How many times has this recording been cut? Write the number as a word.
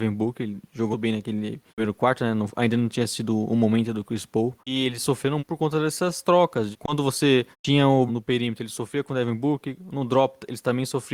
seven